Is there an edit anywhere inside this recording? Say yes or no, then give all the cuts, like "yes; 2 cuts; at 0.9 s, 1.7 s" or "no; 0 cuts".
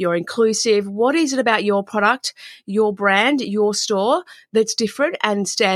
no; 0 cuts